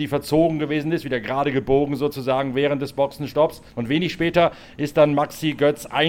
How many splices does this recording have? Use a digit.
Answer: 1